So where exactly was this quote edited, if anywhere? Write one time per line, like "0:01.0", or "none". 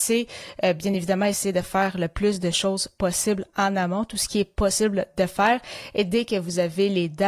none